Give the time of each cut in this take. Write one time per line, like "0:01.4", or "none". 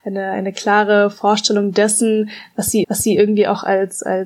0:02.8